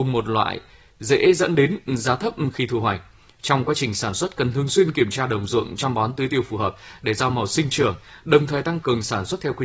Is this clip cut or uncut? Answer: uncut